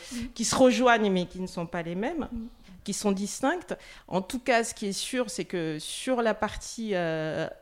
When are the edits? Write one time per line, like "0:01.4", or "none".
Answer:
none